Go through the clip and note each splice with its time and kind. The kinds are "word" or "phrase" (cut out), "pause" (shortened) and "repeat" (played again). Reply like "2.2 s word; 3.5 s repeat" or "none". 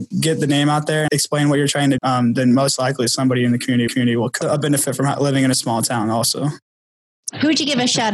1.1 s word; 2.0 s word; 3.9 s repeat; 4.4 s phrase